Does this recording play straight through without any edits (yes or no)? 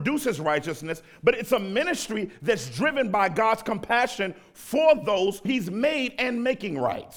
no